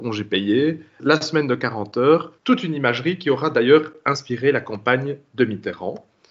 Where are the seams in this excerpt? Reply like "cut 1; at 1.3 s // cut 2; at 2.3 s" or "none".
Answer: cut 1; at 1.0 s // cut 2; at 2.4 s

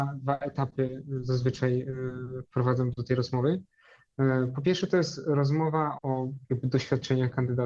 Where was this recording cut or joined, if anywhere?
cut 1; at 5.9 s

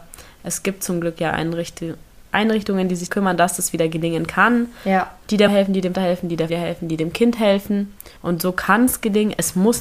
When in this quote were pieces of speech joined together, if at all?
cut 1; at 3.1 s // cut 2; at 5.5 s // cut 3; at 5.9 s // cut 4; at 6.5 s // cut 5; at 8.2 s

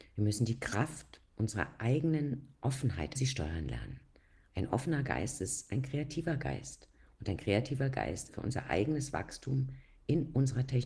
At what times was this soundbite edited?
cut 1; at 3.2 s // cut 2; at 8.3 s

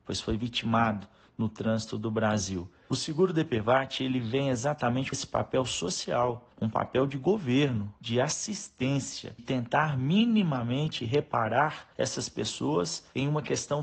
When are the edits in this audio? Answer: cut 1; at 5.1 s // cut 2; at 9.4 s

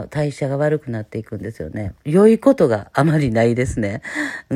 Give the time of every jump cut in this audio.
cut 1; at 2.0 s

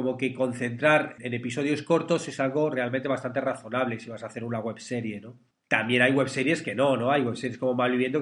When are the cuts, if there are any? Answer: cut 1; at 1.2 s

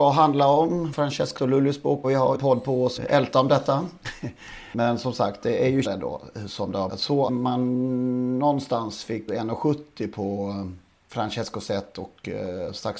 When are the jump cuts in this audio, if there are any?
cut 1; at 0.9 s // cut 2; at 1.4 s // cut 3; at 2.0 s // cut 4; at 2.3 s // cut 5; at 3.0 s // cut 6; at 5.8 s // cut 7; at 6.9 s // cut 8; at 7.3 s // cut 9; at 9.3 s

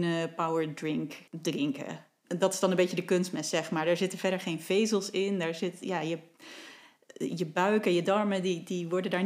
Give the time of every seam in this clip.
cut 1; at 1.3 s

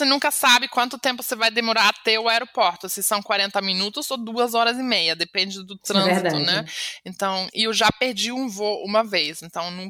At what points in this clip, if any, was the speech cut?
none

